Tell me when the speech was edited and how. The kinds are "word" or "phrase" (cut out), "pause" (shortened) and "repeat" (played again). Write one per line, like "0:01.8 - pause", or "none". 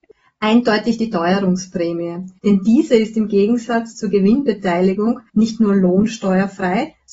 0:02.4 - pause
0:05.3 - pause